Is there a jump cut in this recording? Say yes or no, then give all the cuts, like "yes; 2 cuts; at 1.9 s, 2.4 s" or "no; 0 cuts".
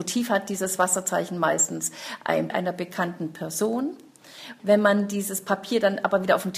yes; 1 cut; at 2.5 s